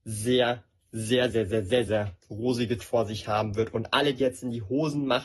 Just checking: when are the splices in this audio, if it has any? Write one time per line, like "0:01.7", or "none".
0:01.3
0:01.9
0:02.8
0:04.2